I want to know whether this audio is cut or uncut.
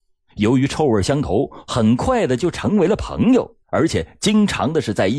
cut